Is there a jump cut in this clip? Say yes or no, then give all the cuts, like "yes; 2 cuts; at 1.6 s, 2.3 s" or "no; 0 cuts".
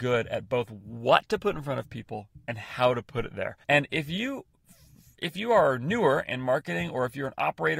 yes; 1 cut; at 3.6 s